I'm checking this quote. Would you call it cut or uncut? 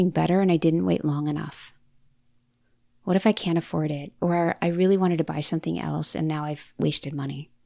uncut